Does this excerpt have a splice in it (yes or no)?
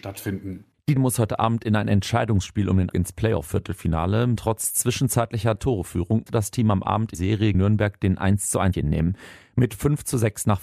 yes